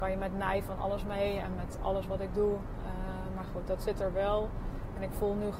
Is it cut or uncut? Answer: uncut